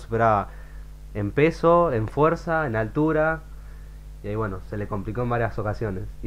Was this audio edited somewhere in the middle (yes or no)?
no